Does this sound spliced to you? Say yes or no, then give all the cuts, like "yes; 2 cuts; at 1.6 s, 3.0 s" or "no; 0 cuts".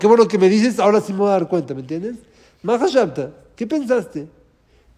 no; 0 cuts